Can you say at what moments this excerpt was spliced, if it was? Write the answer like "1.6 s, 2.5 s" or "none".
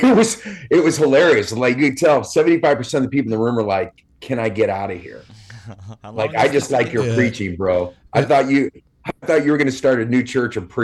none